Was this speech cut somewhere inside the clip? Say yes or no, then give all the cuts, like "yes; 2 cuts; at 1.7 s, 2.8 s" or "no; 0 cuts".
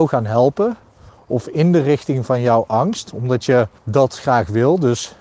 yes; 1 cut; at 3.8 s